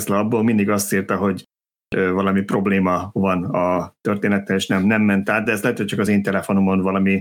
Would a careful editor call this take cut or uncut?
uncut